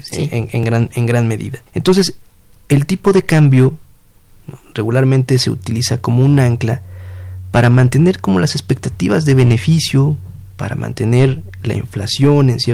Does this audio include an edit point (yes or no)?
yes